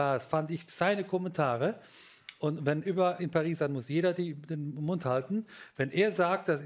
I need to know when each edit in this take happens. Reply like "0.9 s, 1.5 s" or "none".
2.8 s, 3.2 s, 3.6 s

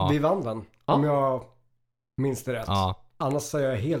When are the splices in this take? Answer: none

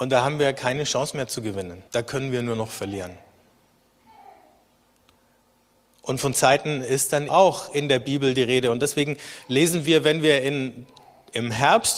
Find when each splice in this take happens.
1.9 s, 6.3 s, 7.3 s

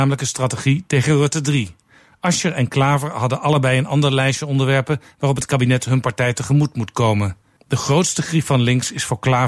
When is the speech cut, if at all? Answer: 7.6 s

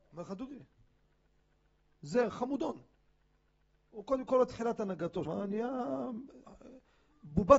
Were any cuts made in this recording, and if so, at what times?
2.3 s, 4.3 s, 5.2 s

